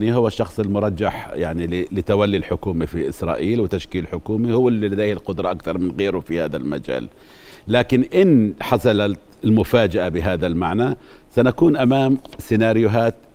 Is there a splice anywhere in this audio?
no; 0 cuts

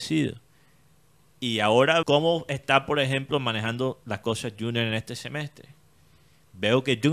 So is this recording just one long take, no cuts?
no; 1 cut; at 2.0 s

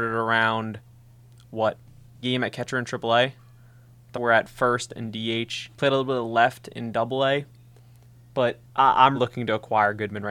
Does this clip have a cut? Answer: yes; 5 cuts; at 2.2 s, 4.1 s, 5.7 s, 8.7 s, 9.1 s

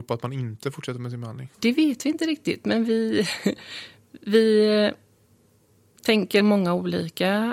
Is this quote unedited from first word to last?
no; 2 cuts; at 1.5 s, 6.4 s

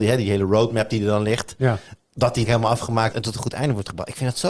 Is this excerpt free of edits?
no; 2 cuts; at 2.4 s, 3.1 s

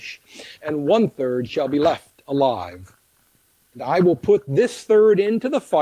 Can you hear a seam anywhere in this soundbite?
no; 0 cuts

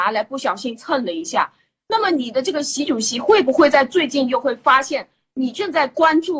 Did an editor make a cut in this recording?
no; 0 cuts

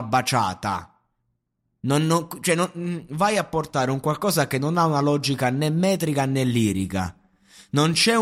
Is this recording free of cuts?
yes; 0 cuts

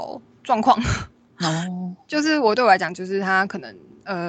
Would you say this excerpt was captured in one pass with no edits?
yes; 0 cuts

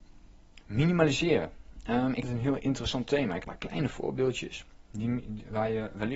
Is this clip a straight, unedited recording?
no; 2 cuts; at 2.2 s, 3.4 s

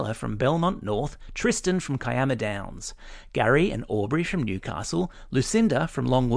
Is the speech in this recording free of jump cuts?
yes; 0 cuts

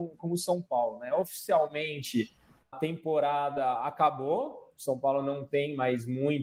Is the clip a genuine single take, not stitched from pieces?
no; 1 cut; at 2.7 s

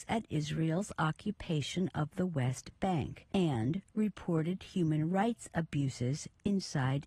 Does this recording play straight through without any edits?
no; 1 cut; at 3.3 s

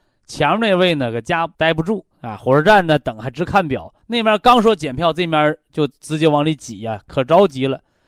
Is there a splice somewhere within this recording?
yes; 3 cuts; at 1.5 s, 2.1 s, 4.0 s

